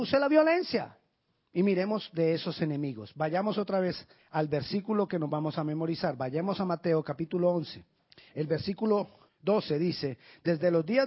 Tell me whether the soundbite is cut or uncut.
cut